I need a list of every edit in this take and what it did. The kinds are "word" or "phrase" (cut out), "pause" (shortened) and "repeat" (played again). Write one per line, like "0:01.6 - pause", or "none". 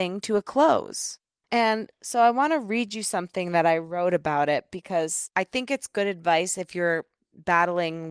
none